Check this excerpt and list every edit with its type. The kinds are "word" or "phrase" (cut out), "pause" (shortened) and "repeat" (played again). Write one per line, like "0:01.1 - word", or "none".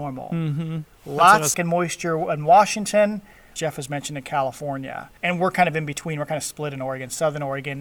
0:01.5 - phrase
0:03.6 - phrase
0:05.2 - pause